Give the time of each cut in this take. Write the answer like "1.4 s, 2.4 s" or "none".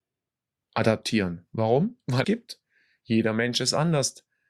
2.2 s

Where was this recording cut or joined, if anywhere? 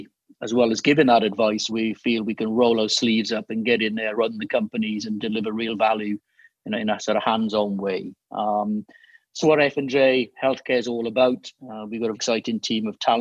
1.7 s, 4.1 s, 9.4 s, 12.1 s

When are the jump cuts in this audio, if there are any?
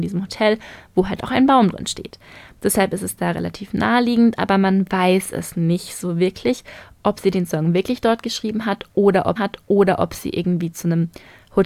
9.4 s

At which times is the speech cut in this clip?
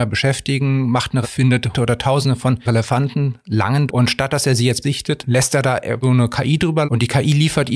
1.2 s, 1.7 s, 2.6 s, 3.9 s, 4.8 s, 6.0 s, 6.8 s

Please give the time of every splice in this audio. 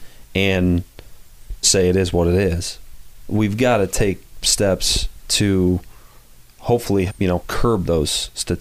1.6 s, 4.4 s, 7.1 s

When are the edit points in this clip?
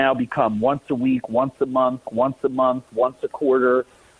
2.0 s

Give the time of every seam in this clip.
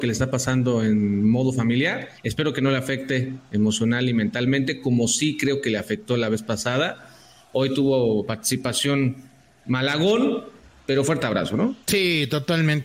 2.2 s, 11.8 s

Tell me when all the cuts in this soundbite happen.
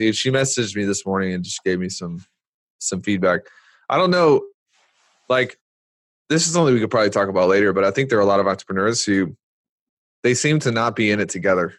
none

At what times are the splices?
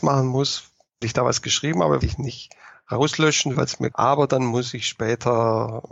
1.0 s, 2.0 s, 3.5 s, 3.9 s

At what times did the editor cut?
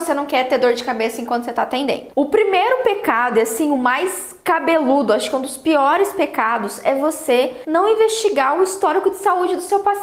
none

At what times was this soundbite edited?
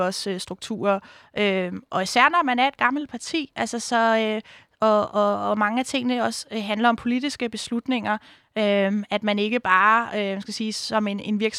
none

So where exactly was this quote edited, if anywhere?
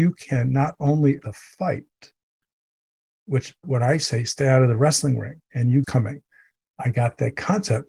1.2 s, 3.6 s, 5.4 s, 5.8 s

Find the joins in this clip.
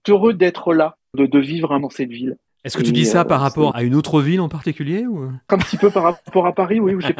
1.1 s, 1.8 s, 3.7 s, 5.5 s

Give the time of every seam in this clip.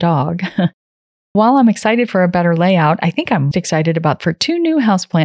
1.3 s, 3.5 s, 4.2 s

